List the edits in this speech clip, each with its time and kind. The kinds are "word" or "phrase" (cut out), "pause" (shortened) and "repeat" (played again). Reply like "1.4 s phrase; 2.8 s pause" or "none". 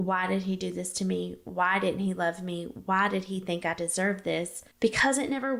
4.7 s pause